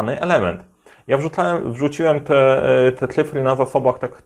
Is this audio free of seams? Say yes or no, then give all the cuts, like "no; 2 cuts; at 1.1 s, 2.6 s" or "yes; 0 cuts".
yes; 0 cuts